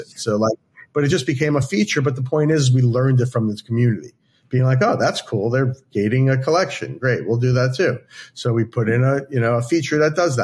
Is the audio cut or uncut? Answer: uncut